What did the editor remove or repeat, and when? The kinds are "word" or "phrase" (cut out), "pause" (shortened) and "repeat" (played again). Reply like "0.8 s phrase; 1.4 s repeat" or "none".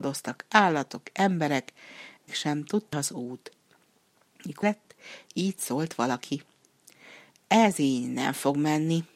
2.3 s word; 2.9 s word; 4.6 s word